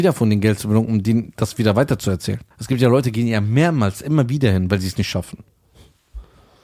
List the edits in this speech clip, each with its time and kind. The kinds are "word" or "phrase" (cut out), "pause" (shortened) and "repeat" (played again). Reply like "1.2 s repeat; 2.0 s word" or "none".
2.5 s pause